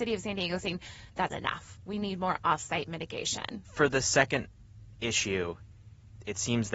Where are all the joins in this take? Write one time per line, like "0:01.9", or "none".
0:01.3
0:03.6